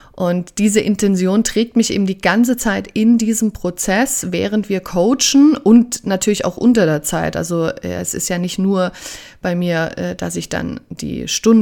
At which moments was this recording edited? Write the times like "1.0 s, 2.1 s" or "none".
none